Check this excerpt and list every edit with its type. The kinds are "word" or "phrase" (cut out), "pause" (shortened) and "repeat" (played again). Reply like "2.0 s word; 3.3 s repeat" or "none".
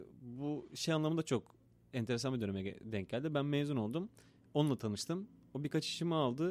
none